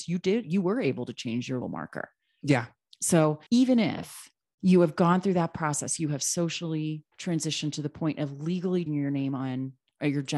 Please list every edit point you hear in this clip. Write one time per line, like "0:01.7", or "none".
0:01.6
0:03.5
0:07.1
0:08.9